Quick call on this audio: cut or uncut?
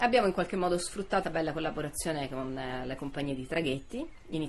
cut